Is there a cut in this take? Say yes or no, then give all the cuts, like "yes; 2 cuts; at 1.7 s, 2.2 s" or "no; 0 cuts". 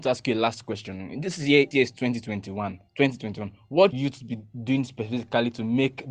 yes; 3 cuts; at 1.7 s, 2.9 s, 3.9 s